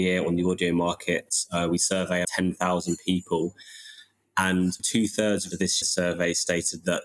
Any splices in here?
yes; 4 cuts; at 2.2 s, 4.8 s, 5.5 s, 5.8 s

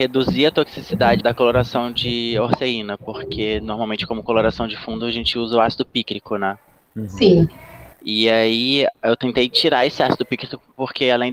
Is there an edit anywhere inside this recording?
yes; 2 cuts; at 1.2 s, 7.9 s

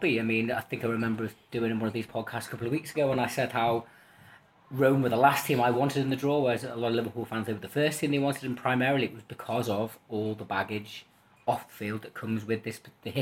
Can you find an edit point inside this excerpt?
no; 0 cuts

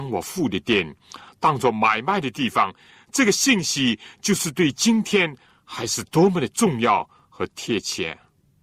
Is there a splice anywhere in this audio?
no; 0 cuts

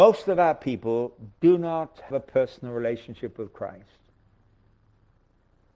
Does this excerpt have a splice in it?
yes; 1 cut; at 2.1 s

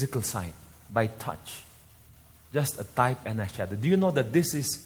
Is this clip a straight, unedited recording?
yes; 0 cuts

